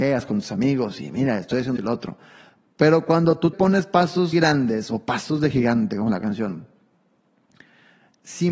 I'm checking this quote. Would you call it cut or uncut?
cut